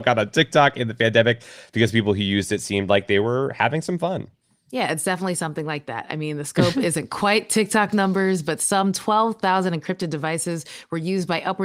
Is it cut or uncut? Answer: uncut